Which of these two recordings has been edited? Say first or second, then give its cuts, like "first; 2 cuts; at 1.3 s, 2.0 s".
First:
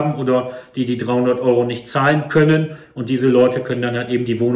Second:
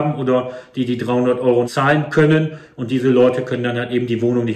second; 1 cut; at 1.6 s